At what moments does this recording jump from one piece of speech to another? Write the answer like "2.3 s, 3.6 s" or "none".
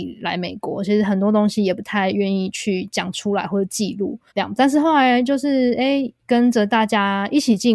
4.3 s, 6.2 s